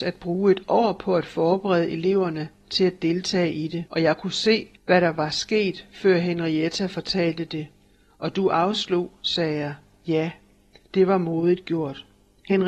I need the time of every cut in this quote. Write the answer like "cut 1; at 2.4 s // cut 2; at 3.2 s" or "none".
cut 1; at 3.9 s // cut 2; at 4.8 s

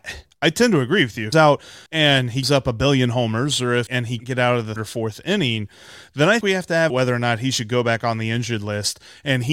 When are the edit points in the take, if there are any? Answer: cut 1; at 1.3 s // cut 2; at 1.9 s // cut 3; at 2.4 s // cut 4; at 3.9 s // cut 5; at 4.2 s // cut 6; at 4.8 s // cut 7; at 6.4 s // cut 8; at 6.9 s

